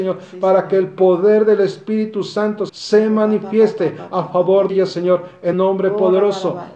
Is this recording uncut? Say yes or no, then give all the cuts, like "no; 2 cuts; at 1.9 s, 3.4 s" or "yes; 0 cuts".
no; 3 cuts; at 2.7 s, 4.7 s, 5.5 s